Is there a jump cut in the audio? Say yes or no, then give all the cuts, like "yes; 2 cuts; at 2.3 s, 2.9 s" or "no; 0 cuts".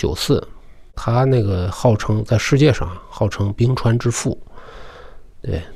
no; 0 cuts